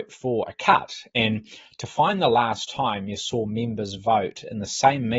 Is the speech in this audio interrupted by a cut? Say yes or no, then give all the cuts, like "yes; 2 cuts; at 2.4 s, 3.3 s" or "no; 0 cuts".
no; 0 cuts